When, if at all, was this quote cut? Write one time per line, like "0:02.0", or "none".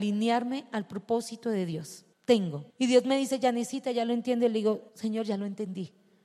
0:02.7
0:04.9